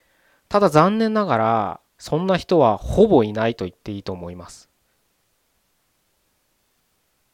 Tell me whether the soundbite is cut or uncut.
cut